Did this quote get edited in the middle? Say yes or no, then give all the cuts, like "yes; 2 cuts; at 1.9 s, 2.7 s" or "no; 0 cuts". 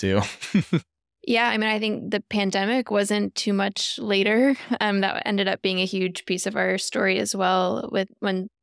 no; 0 cuts